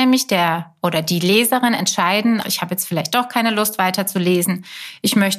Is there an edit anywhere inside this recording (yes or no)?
yes